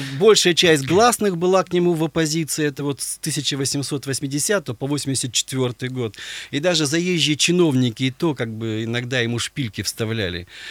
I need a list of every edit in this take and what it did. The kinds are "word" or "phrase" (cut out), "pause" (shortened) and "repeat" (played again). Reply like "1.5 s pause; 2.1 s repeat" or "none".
none